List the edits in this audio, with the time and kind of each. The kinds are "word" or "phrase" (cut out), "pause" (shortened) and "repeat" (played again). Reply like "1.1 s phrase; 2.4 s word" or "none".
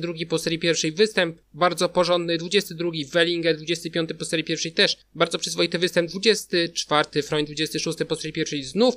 1.4 s pause